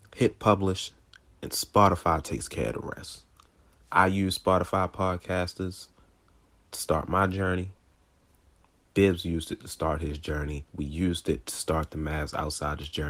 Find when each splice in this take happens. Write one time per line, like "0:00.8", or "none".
0:10.7

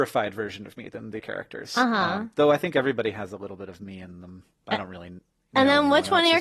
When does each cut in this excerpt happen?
0:01.2

